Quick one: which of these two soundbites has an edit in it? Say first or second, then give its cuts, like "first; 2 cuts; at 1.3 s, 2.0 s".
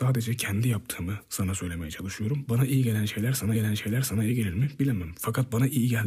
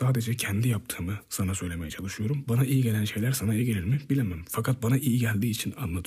first; 1 cut; at 3.5 s